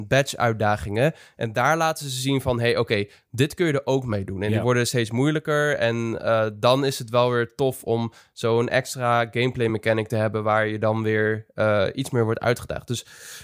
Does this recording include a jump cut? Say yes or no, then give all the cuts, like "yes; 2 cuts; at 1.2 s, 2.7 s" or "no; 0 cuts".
no; 0 cuts